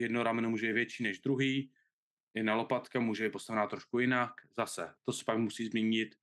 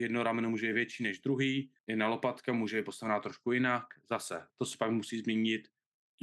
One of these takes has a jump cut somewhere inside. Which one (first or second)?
second